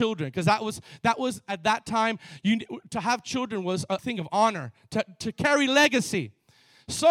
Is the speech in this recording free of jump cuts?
no; 1 cut; at 4.0 s

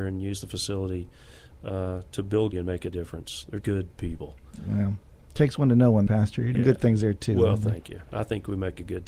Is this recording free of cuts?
no; 4 cuts; at 2.5 s, 3.6 s, 6.1 s, 6.5 s

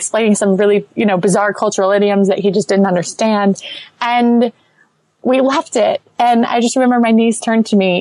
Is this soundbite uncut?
yes; 0 cuts

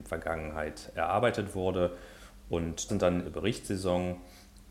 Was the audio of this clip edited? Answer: yes; 2 cuts; at 2.9 s, 3.2 s

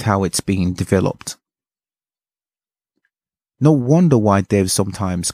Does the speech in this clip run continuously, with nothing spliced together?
yes; 0 cuts

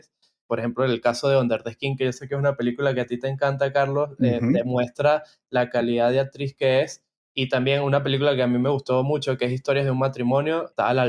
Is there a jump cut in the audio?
no; 0 cuts

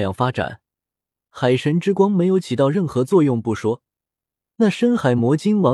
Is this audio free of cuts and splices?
yes; 0 cuts

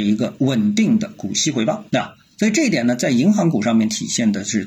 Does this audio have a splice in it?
yes; 1 cut; at 1.9 s

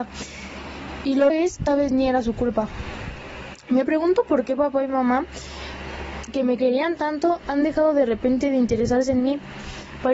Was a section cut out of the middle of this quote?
yes; 2 cuts; at 1.3 s, 1.7 s

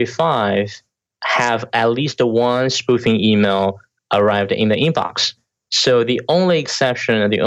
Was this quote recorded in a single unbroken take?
yes; 0 cuts

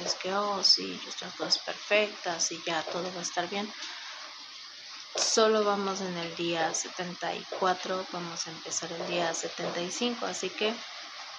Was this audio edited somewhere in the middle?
yes; 1 cut; at 1.2 s

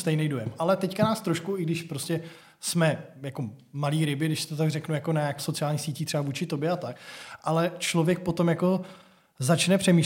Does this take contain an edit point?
yes; 1 cut; at 5.4 s

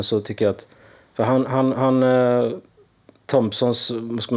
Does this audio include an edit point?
no; 0 cuts

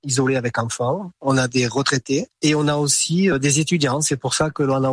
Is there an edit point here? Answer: no; 0 cuts

